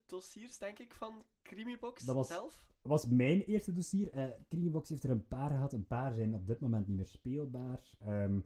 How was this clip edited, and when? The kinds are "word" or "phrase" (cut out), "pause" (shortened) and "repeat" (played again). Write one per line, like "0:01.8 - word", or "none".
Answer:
none